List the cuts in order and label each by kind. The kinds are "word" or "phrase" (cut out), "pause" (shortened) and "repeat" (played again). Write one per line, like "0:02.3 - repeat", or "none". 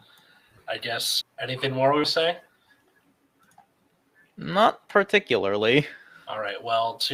0:01.2 - word
0:02.0 - word